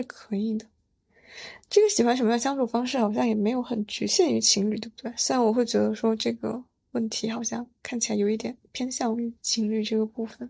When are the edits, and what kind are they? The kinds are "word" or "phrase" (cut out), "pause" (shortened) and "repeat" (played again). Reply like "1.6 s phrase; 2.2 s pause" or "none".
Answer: 1.6 s pause; 9.4 s pause